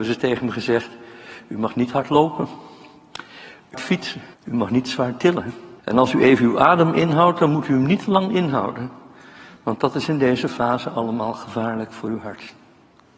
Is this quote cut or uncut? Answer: cut